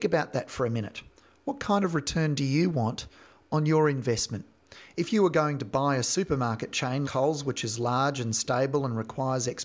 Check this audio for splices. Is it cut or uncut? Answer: cut